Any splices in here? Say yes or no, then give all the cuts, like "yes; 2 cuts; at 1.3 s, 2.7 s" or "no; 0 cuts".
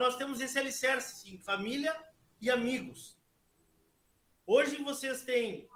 no; 0 cuts